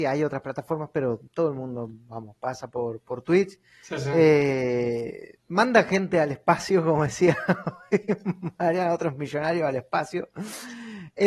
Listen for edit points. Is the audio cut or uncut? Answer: cut